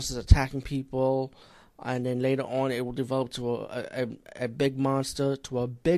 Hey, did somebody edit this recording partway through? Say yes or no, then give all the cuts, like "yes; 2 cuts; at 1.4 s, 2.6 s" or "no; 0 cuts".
no; 0 cuts